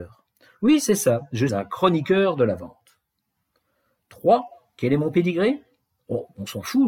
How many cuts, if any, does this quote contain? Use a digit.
1